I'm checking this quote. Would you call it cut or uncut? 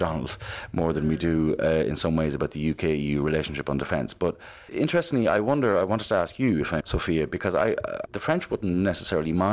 cut